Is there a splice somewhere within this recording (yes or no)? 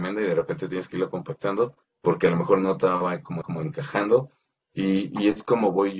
yes